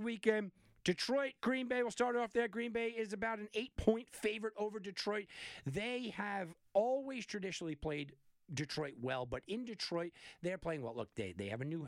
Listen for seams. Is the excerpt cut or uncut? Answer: uncut